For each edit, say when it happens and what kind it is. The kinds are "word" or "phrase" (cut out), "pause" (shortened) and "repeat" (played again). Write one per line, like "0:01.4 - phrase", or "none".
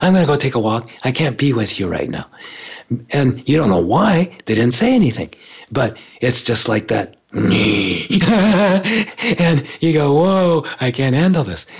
none